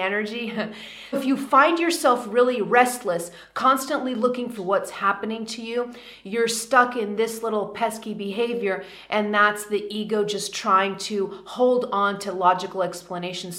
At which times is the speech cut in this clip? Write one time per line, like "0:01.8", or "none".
0:01.1
0:04.6